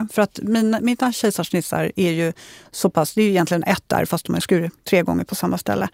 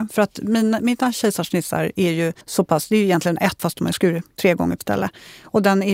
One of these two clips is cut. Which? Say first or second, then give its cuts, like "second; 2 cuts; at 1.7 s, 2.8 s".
second; 3 cuts; at 2.4 s, 3.6 s, 4.8 s